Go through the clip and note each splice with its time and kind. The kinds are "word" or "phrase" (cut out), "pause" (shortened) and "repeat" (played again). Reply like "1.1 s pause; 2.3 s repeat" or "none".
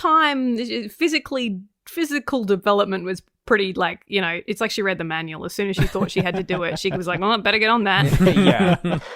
none